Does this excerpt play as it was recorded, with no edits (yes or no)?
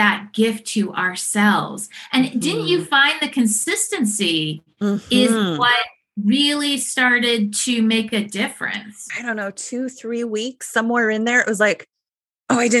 no